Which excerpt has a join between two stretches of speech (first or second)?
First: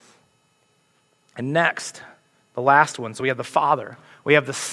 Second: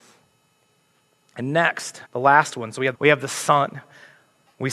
second